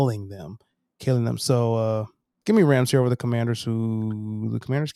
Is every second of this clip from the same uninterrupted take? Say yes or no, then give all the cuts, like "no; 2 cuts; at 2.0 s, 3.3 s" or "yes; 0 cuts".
no; 1 cut; at 2.4 s